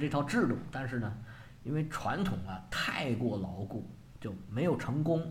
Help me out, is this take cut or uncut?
uncut